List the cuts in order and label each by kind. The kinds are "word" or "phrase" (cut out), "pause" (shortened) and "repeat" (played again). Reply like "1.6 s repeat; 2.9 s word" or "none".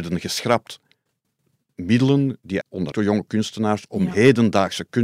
2.6 s word; 2.9 s phrase